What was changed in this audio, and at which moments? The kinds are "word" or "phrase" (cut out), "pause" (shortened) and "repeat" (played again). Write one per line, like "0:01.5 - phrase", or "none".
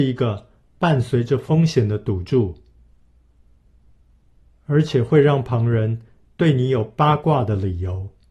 none